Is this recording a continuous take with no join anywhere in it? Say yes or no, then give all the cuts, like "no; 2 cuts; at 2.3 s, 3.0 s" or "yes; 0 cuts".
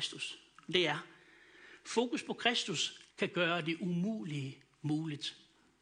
no; 1 cut; at 3.1 s